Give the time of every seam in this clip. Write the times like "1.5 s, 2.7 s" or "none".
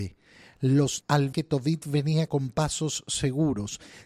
1.0 s, 1.3 s, 2.3 s